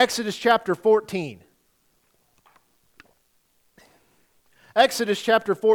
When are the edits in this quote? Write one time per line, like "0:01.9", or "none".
none